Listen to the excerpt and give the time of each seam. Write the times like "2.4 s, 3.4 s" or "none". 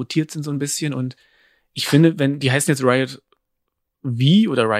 none